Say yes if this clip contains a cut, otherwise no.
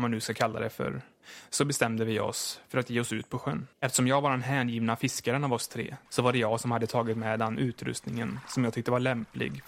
yes